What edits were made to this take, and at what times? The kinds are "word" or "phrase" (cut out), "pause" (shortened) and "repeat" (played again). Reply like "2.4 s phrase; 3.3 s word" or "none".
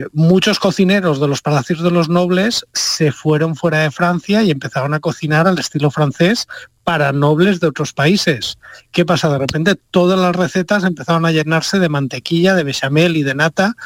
none